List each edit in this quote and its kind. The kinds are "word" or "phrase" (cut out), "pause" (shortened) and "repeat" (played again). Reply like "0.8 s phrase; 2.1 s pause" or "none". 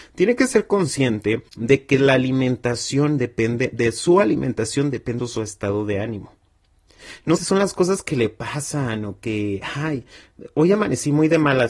1.5 s pause; 5.2 s word; 7.4 s word